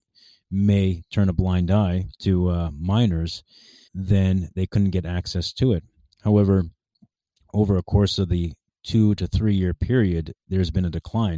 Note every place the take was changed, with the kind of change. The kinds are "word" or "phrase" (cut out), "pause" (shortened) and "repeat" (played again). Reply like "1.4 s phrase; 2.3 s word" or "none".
2.2 s pause; 3.9 s word